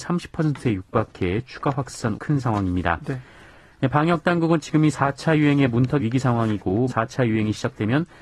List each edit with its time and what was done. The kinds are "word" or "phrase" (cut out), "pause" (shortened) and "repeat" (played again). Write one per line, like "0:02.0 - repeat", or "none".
0:02.1 - word
0:06.0 - phrase
0:06.9 - word